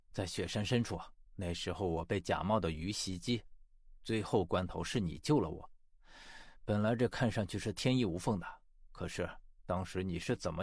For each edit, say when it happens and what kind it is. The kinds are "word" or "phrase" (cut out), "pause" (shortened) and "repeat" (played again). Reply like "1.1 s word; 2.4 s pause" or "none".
1.3 s pause